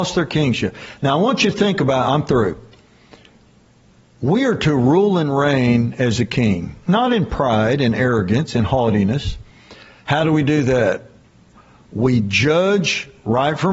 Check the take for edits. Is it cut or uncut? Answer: uncut